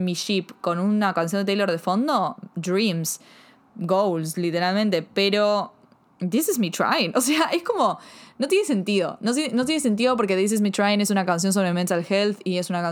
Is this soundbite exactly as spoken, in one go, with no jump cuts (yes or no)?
yes